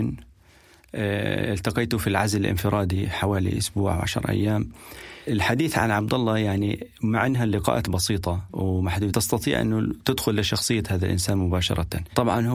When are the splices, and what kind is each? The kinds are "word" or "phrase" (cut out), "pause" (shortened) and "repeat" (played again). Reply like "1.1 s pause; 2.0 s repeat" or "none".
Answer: 9.1 s word

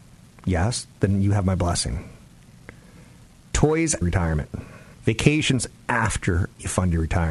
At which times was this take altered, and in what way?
4.0 s phrase; 4.9 s pause

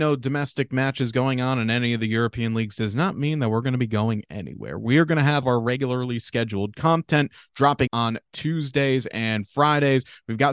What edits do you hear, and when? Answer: 5.4 s word; 7.9 s word

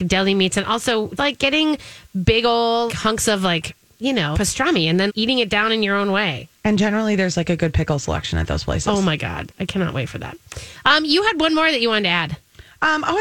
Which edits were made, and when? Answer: 1.2 s word; 2.9 s word; 4.3 s word; 5.1 s word

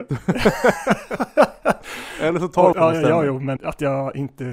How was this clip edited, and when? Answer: 2.7 s phrase; 3.6 s word

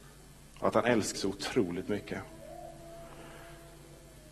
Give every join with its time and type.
1.1 s word

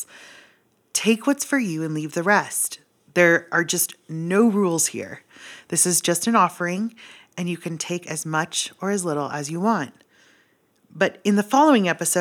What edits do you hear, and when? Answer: none

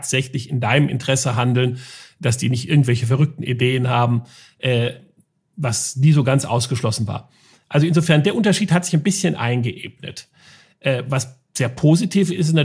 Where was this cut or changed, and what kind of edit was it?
none

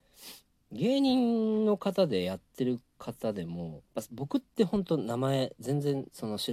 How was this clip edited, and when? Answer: 3.9 s pause

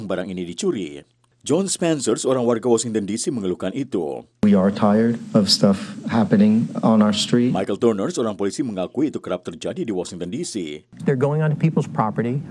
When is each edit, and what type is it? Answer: none

